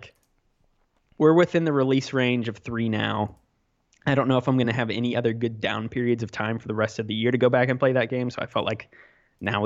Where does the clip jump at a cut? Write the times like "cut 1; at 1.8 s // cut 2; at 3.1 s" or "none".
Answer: none

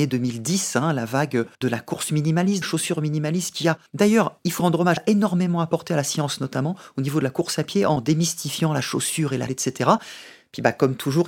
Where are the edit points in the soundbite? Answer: cut 1; at 1.5 s // cut 2; at 2.6 s // cut 3; at 3.9 s // cut 4; at 4.6 s // cut 5; at 5.0 s // cut 6; at 9.5 s

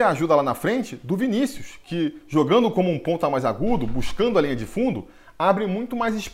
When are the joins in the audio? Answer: none

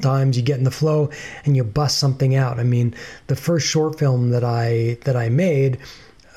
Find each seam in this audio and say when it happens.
none

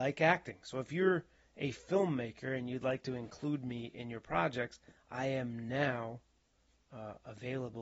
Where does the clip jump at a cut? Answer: none

